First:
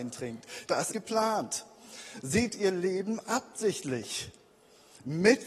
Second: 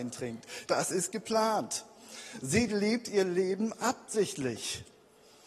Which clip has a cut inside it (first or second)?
first